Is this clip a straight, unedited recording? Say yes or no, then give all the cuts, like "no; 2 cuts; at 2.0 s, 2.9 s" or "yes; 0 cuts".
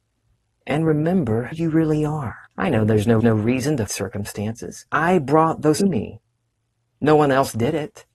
no; 6 cuts; at 1.5 s, 2.5 s, 3.2 s, 3.9 s, 4.9 s, 5.8 s